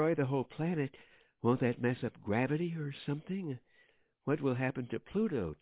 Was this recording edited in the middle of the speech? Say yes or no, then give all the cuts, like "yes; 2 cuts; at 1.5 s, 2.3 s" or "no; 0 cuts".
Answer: no; 0 cuts